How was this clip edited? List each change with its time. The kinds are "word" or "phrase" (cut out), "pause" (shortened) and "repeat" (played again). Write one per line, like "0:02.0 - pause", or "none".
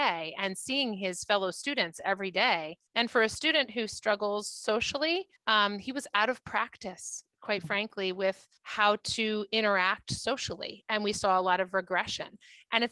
0:02.9 - pause
0:05.4 - pause
0:08.6 - pause